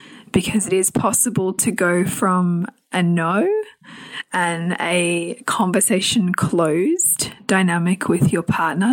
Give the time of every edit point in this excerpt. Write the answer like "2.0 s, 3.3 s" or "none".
none